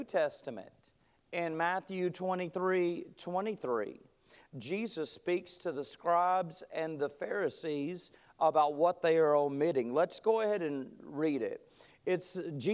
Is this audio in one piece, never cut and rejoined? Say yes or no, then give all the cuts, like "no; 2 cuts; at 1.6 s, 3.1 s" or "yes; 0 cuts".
yes; 0 cuts